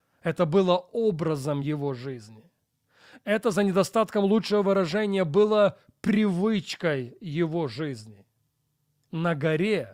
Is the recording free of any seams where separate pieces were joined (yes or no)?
yes